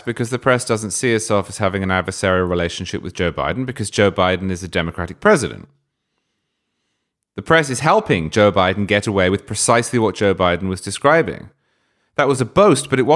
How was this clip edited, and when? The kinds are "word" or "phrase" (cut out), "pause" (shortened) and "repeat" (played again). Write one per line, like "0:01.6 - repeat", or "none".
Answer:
none

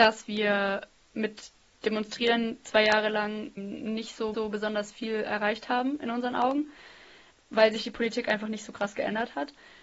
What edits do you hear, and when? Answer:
0:04.3 - repeat

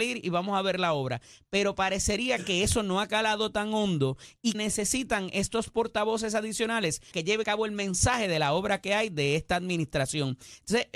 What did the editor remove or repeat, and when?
0:04.5 - word
0:07.1 - word
0:07.4 - word

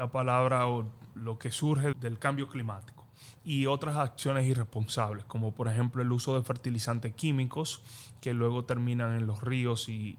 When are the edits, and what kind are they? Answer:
0:01.1 - word
0:01.9 - word

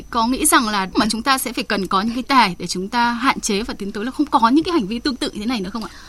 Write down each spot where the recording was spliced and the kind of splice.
0:00.9 - phrase
0:02.2 - word

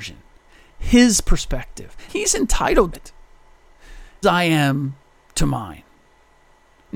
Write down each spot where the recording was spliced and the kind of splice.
0:02.1 - word
0:02.9 - word
0:04.2 - word

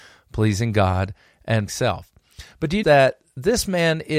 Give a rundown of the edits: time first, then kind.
0:01.7 - word
0:02.8 - word

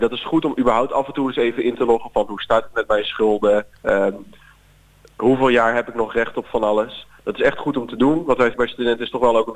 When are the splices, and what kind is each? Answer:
0:03.7 - pause
0:08.5 - phrase

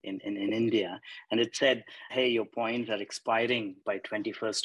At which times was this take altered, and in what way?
0:02.1 - word

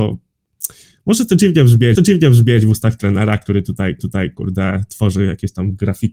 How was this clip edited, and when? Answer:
0:02.0 - repeat
0:04.0 - repeat

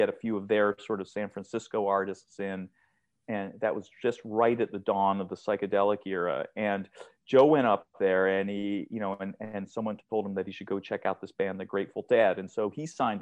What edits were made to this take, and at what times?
none

